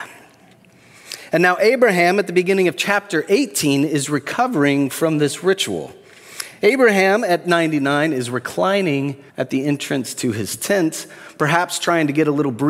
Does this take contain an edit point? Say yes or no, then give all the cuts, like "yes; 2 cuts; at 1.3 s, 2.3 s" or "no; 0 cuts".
yes; 1 cut; at 9.3 s